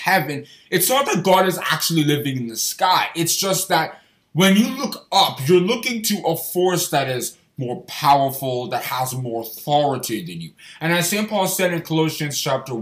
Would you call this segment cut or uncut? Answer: uncut